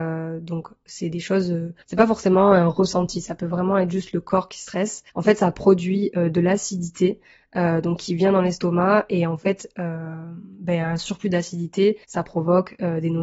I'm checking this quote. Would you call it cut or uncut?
cut